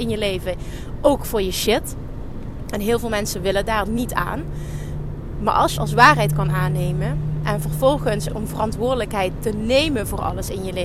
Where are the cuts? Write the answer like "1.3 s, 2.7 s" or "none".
3.9 s, 5.8 s, 8.3 s